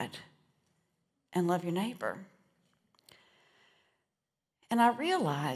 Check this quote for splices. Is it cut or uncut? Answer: uncut